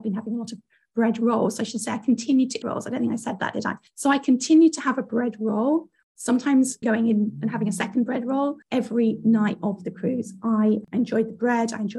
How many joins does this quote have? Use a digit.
3